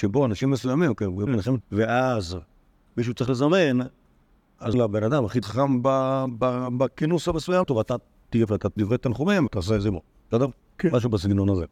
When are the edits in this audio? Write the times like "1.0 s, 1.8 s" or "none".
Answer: 1.3 s, 1.6 s, 4.7 s, 5.4 s, 7.6 s, 8.5 s, 8.8 s, 9.5 s